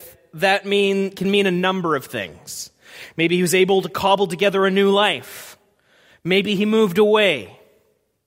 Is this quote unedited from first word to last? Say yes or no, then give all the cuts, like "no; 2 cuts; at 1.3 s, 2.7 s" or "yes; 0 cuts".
yes; 0 cuts